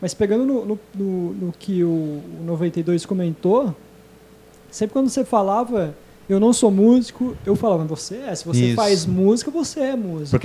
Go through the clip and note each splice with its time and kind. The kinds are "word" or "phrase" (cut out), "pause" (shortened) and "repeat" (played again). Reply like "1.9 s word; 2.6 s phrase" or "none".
none